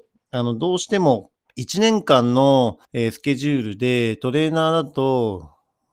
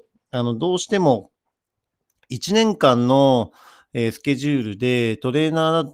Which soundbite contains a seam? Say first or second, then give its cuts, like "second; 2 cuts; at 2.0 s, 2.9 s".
first; 2 cuts; at 1.5 s, 2.8 s